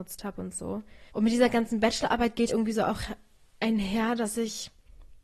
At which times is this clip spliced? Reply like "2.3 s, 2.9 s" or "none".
1.1 s, 2.5 s